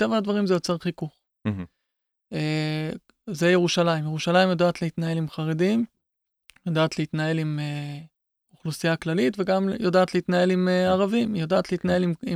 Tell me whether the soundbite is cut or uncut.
uncut